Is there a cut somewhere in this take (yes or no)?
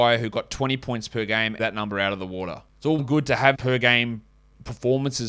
yes